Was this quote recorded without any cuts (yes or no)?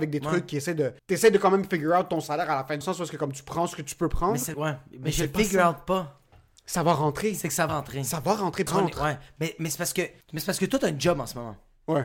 no